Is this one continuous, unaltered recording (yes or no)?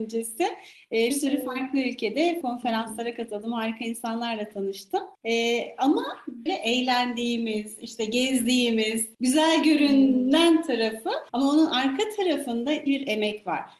no